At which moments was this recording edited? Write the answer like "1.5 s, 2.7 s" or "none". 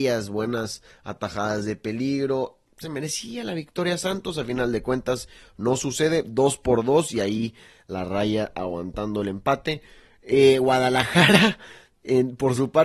none